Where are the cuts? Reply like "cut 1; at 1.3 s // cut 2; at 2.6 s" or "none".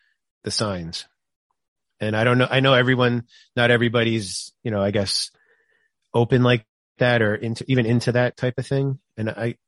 none